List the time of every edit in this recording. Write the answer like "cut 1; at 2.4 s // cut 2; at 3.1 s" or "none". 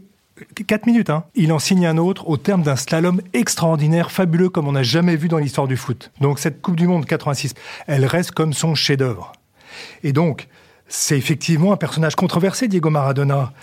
cut 1; at 1.3 s // cut 2; at 12.2 s

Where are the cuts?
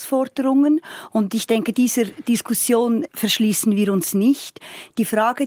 cut 1; at 3.1 s

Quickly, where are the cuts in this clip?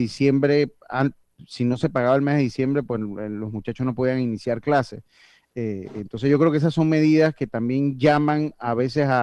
none

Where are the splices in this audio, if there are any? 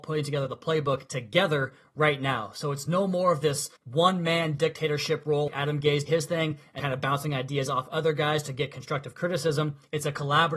cut 1; at 3.8 s // cut 2; at 5.5 s // cut 3; at 6.1 s // cut 4; at 6.8 s

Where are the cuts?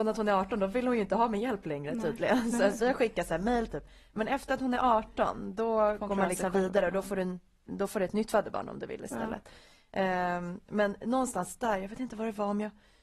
cut 1; at 2.8 s

